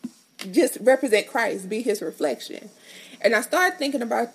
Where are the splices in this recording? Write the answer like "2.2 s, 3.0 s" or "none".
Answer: none

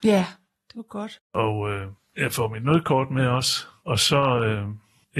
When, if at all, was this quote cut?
1.2 s

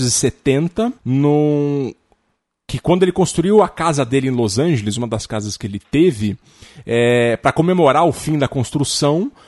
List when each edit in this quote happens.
1.0 s

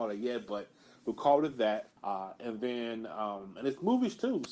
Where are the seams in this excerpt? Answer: 2.0 s

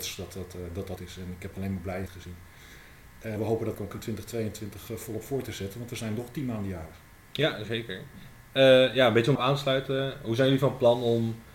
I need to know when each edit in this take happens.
1.0 s, 2.1 s, 3.4 s, 3.7 s, 7.7 s, 9.4 s

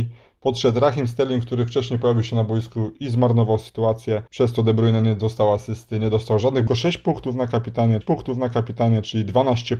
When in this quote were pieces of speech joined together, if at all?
4.3 s, 6.7 s, 8.0 s

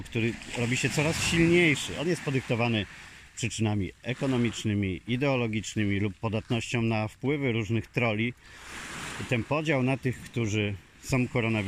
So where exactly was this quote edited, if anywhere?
none

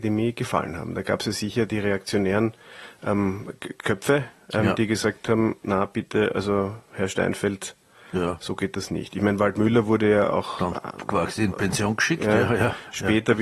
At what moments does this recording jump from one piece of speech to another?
none

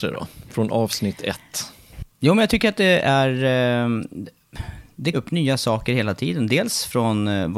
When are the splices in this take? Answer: 2.1 s, 5.1 s

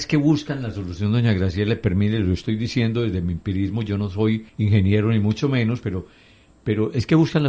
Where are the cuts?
4.5 s

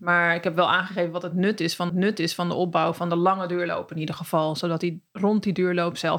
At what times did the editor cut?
1.9 s, 5.1 s

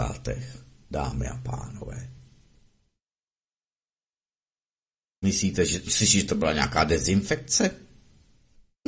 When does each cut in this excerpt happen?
none

